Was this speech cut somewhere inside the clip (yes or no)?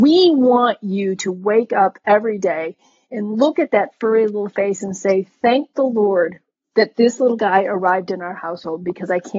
no